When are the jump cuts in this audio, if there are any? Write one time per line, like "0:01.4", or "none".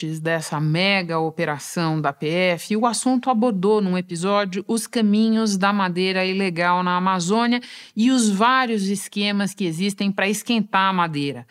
none